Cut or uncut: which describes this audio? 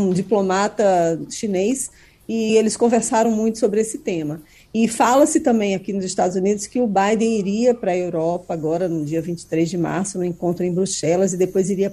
uncut